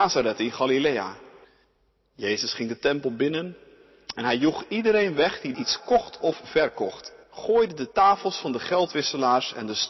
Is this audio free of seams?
no; 3 cuts; at 1.4 s, 5.5 s, 7.2 s

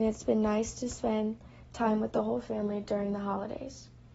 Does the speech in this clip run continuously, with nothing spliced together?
yes; 0 cuts

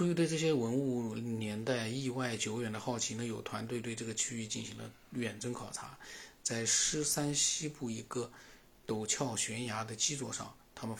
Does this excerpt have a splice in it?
no; 0 cuts

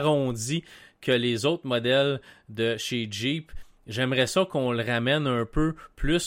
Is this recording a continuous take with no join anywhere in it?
yes; 0 cuts

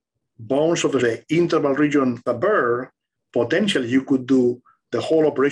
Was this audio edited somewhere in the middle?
yes; 2 cuts; at 1.0 s, 2.3 s

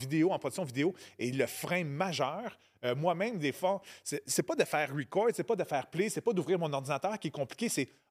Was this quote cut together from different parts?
no; 0 cuts

